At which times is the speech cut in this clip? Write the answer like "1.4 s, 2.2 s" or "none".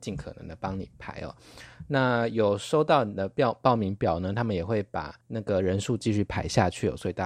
5.2 s